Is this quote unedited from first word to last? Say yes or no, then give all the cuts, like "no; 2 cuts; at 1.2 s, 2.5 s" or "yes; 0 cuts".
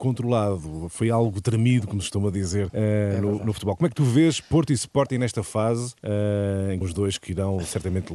no; 3 cuts; at 2.7 s, 6.0 s, 6.8 s